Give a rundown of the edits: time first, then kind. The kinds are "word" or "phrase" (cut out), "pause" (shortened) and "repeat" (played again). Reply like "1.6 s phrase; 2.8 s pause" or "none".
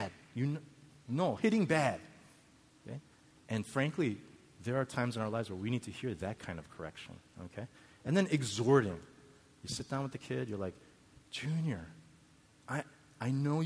none